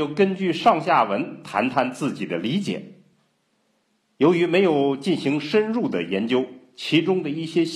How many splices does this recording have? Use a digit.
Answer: 0